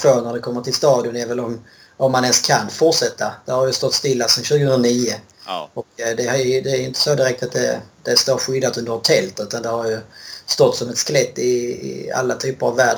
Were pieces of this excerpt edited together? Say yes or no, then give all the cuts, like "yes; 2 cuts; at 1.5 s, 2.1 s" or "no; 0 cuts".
no; 0 cuts